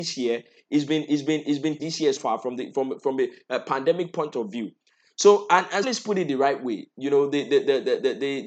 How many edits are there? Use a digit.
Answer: 3